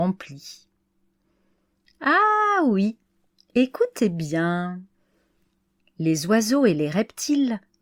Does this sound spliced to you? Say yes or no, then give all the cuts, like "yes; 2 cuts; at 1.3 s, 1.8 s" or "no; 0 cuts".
no; 0 cuts